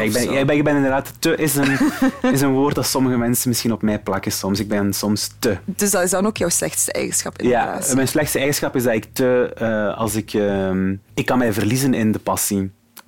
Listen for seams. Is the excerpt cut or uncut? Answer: cut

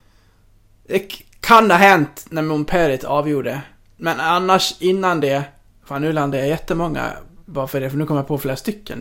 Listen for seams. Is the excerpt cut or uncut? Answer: uncut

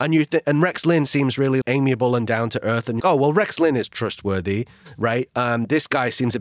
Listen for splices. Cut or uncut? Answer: cut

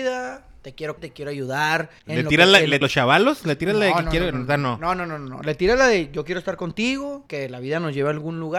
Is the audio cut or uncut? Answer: cut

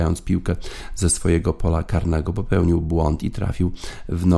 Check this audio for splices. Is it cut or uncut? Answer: uncut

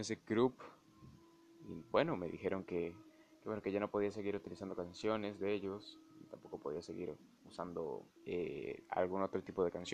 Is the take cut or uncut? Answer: cut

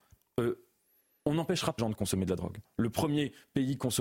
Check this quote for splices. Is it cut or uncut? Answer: cut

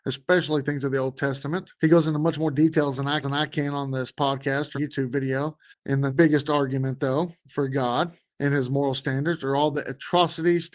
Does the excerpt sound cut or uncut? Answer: cut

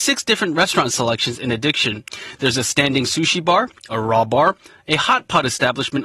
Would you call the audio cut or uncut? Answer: uncut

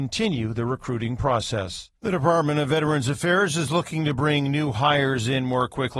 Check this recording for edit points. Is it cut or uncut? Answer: cut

